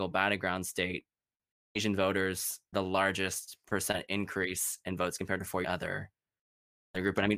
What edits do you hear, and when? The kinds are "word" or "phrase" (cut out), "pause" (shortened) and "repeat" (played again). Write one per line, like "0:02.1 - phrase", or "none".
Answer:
0:02.7 - word
0:05.2 - word
0:05.6 - phrase